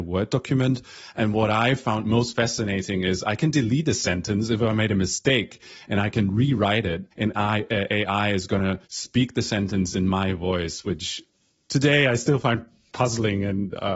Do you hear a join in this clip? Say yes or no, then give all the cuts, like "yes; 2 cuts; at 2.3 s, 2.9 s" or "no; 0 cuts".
yes; 3 cuts; at 7.1 s, 8.9 s, 12.9 s